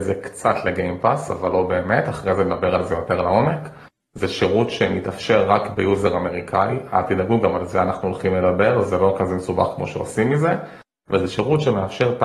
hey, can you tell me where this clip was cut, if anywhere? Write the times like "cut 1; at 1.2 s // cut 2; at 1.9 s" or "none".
none